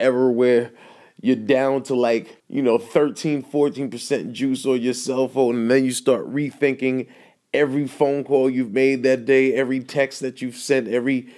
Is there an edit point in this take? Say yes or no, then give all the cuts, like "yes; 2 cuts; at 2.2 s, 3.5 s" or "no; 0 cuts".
yes; 1 cut; at 2.4 s